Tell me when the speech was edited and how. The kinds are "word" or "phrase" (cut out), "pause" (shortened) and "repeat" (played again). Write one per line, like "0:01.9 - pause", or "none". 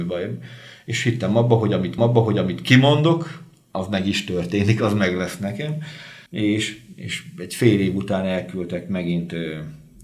0:02.0 - repeat
0:06.3 - pause